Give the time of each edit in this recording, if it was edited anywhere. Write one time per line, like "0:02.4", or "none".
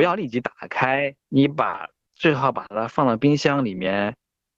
0:01.2